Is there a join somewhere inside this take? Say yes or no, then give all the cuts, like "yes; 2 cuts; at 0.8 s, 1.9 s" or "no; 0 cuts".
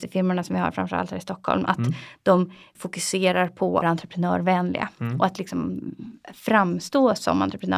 yes; 2 cuts; at 2.7 s, 3.8 s